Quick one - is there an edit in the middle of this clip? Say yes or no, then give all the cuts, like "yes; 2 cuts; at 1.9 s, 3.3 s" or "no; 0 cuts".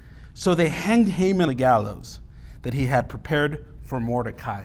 yes; 1 cut; at 1.5 s